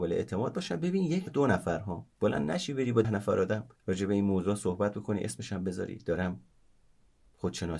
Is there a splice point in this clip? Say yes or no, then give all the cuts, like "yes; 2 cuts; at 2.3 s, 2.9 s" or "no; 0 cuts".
yes; 4 cuts; at 1.3 s, 2.1 s, 3.0 s, 3.8 s